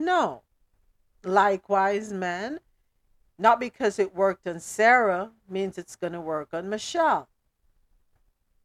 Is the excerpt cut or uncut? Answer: uncut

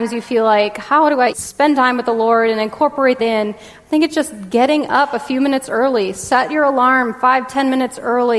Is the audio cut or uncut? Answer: cut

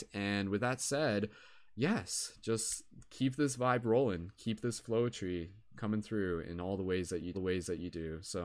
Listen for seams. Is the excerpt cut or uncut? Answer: cut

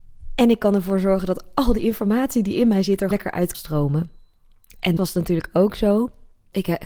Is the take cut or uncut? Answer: cut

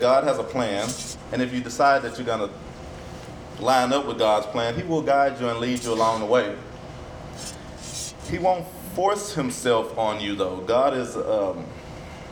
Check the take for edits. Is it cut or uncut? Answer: uncut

